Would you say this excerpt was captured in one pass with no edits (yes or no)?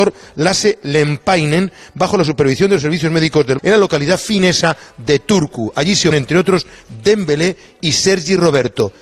no